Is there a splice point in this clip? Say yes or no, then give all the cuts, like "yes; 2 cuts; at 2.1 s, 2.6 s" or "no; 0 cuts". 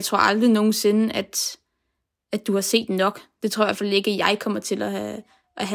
no; 0 cuts